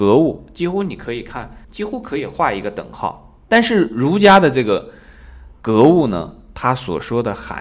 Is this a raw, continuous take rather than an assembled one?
no; 3 cuts; at 1.6 s, 3.4 s, 5.6 s

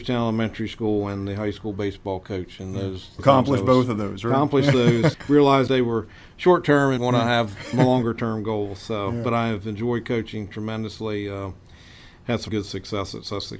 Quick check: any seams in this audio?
yes; 6 cuts; at 3.2 s, 5.1 s, 5.7 s, 7.0 s, 7.7 s, 12.5 s

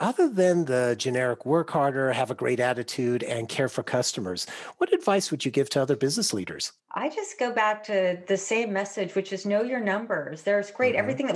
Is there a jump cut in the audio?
yes; 1 cut; at 6.8 s

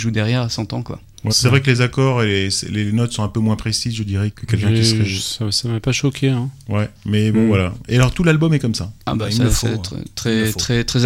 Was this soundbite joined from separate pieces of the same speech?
yes; 4 cuts; at 1.3 s, 4.3 s, 5.8 s, 9.0 s

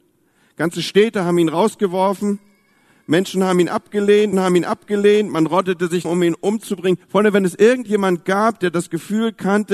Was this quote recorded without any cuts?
no; 3 cuts; at 4.3 s, 6.0 s, 7.0 s

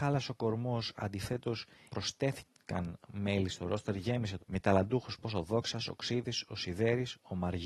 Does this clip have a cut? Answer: yes; 3 cuts; at 1.9 s, 4.4 s, 5.2 s

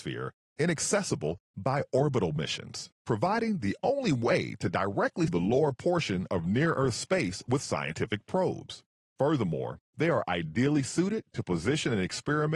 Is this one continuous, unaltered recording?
no; 3 cuts; at 3.0 s, 5.3 s, 9.0 s

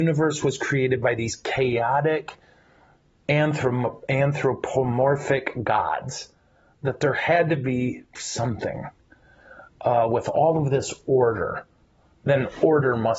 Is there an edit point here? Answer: no; 0 cuts

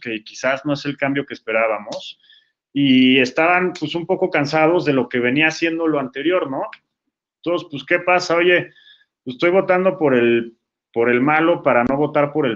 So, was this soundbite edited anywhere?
no; 0 cuts

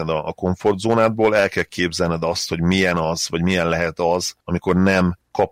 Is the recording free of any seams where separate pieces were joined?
yes; 0 cuts

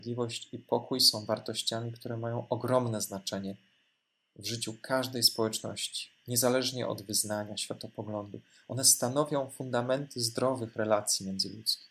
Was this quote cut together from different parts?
no; 0 cuts

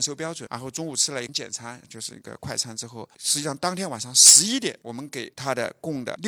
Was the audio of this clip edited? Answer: yes; 1 cut; at 1.8 s

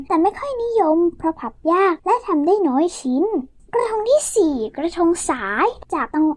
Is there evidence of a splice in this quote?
no; 0 cuts

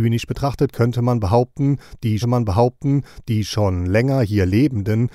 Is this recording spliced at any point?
yes; 1 cut; at 2.2 s

